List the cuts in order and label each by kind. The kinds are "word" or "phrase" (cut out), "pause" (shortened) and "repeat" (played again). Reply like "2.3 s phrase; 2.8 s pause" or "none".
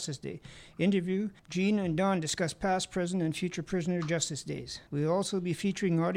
1.4 s pause; 4.9 s pause